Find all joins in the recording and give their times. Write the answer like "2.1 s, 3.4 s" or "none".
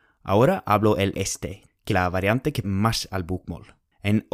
1.1 s, 1.9 s, 2.6 s

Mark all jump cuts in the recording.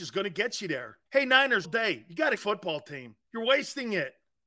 1.1 s, 1.6 s, 2.4 s, 3.2 s

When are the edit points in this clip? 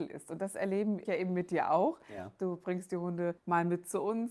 1.0 s, 3.4 s

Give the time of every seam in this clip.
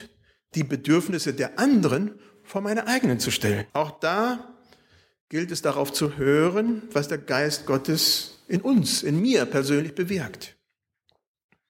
3.7 s

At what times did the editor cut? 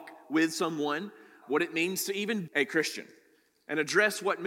1.4 s, 2.5 s

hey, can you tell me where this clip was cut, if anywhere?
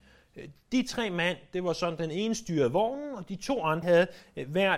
3.8 s

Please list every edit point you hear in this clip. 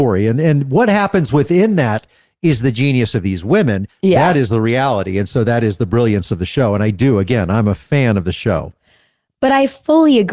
none

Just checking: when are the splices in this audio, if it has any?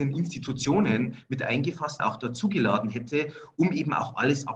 2.0 s

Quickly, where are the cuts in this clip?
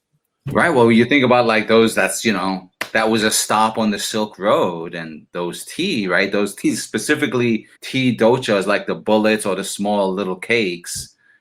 7.7 s

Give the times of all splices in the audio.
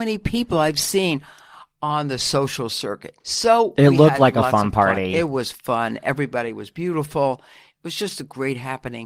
3.2 s

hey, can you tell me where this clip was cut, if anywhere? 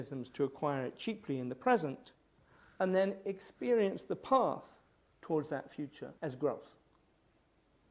6.2 s

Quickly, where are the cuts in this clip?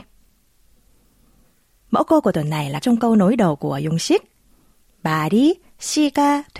2.8 s

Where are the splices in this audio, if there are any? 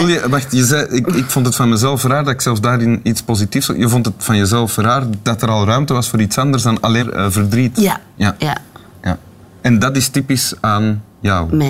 7.0 s

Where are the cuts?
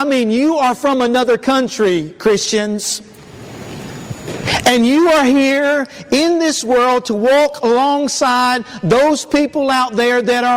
none

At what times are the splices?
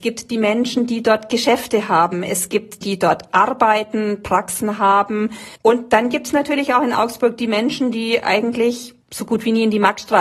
2.8 s, 5.6 s, 9.0 s

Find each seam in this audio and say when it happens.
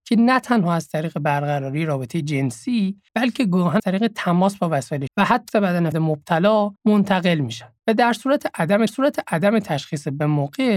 3.1 s, 3.8 s, 5.1 s, 5.5 s, 5.9 s, 6.8 s, 7.8 s, 8.9 s

